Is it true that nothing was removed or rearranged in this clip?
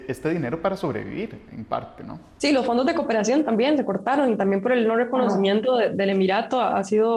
yes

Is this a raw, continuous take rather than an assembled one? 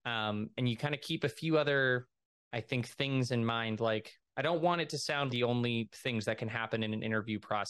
no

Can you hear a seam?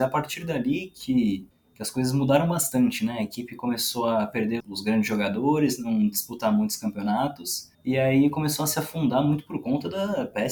yes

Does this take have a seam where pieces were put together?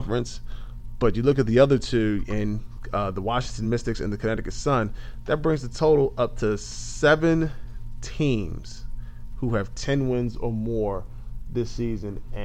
no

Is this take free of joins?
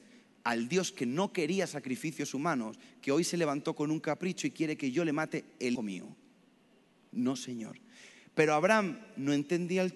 no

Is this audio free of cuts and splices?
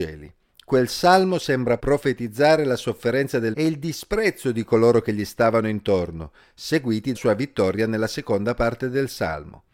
no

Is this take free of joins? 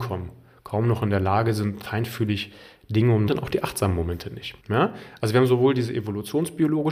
no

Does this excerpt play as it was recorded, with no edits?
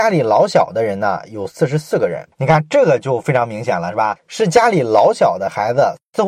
no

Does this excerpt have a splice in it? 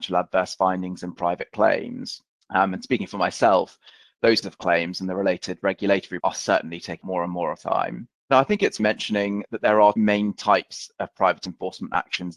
yes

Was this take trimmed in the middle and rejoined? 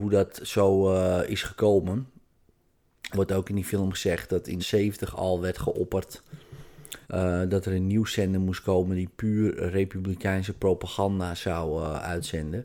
yes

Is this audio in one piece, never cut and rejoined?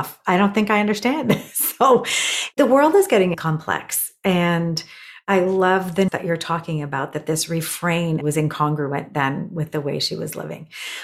no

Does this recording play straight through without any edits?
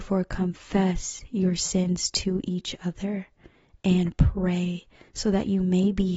yes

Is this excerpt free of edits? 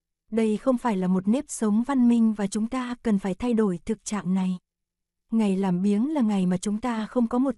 yes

